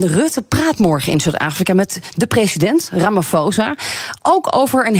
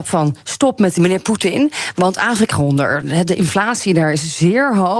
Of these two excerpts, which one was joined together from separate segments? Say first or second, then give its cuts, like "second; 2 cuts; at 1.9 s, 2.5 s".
second; 2 cuts; at 1.0 s, 2.5 s